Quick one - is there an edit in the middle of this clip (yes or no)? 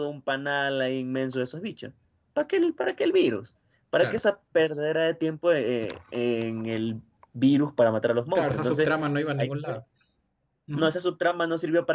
no